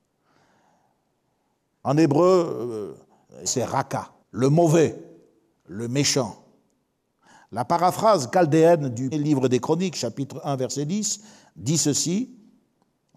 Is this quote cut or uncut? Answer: cut